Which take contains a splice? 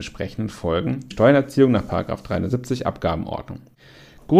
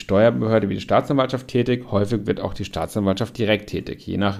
first; 1 cut; at 1.1 s

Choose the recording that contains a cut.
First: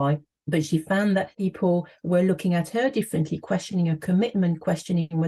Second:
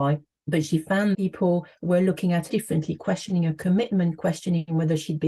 second; 2 cuts; at 1.1 s, 2.5 s

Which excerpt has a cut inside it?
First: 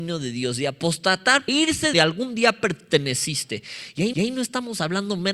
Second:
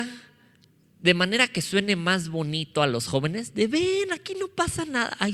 first; 3 cuts; at 1.5 s, 1.9 s, 4.1 s

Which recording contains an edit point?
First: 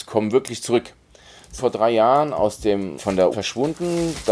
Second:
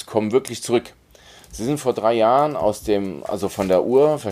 first; 3 cuts; at 1.6 s, 3.0 s, 3.3 s

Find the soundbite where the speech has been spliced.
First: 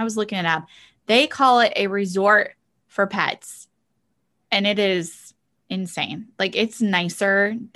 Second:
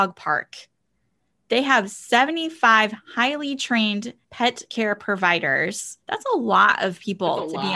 second; 2 cuts; at 4.2 s, 6.0 s

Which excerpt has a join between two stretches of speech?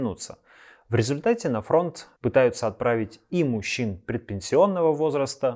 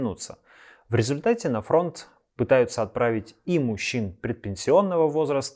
first; 1 cut; at 2.2 s

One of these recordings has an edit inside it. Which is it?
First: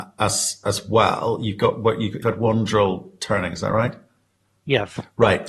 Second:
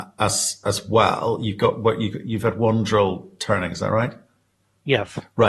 first; 1 cut; at 2.2 s

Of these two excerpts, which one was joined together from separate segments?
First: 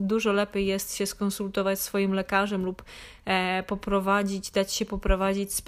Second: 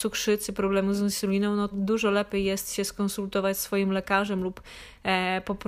second; 1 cut; at 1.7 s

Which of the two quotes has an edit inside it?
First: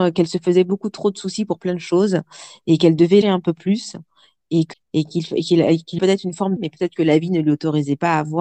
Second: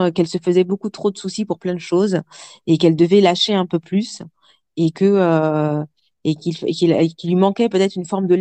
first; 4 cuts; at 3.2 s, 4.7 s, 6.0 s, 6.6 s

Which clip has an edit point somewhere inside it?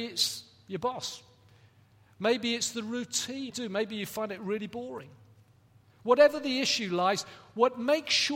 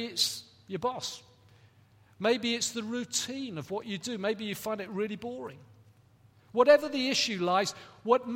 first; 1 cut; at 3.5 s

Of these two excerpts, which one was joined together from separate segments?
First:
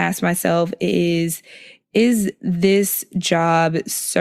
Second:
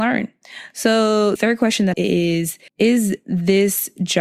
second; 3 cuts; at 1.4 s, 1.9 s, 2.7 s

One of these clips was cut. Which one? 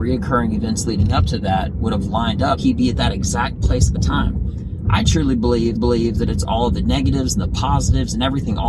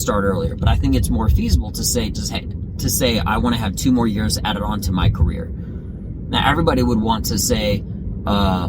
first; 3 cuts; at 2.6 s, 4.0 s, 5.8 s

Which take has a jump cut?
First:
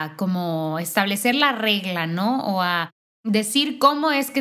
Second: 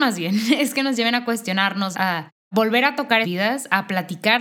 second; 2 cuts; at 1.9 s, 3.2 s

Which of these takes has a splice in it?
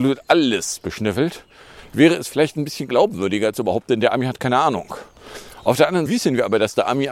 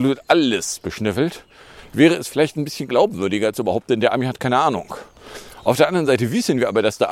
first; 1 cut; at 6.1 s

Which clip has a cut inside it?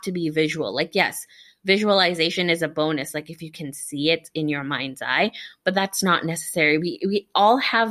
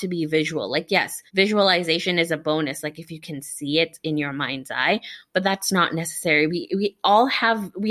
second; 1 cut; at 1.3 s

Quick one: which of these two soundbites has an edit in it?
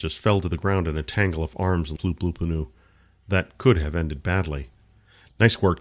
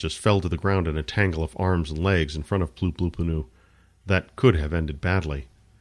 first; 1 cut; at 2.0 s

